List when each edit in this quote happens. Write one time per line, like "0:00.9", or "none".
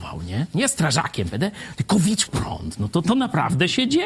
0:02.3